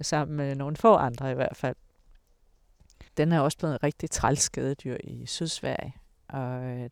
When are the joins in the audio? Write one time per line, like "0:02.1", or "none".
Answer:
0:03.1